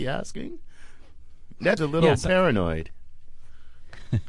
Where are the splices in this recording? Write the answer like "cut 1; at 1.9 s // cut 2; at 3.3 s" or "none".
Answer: cut 1; at 1.8 s